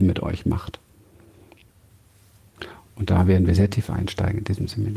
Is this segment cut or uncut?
uncut